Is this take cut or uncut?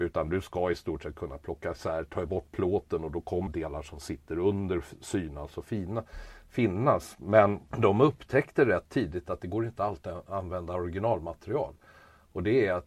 cut